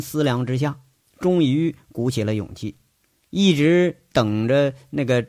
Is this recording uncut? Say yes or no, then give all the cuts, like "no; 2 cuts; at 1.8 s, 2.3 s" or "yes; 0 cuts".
yes; 0 cuts